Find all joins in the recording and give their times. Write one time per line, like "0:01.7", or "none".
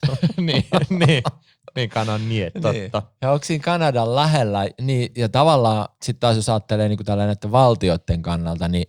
none